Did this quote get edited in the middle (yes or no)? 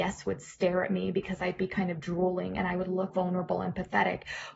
yes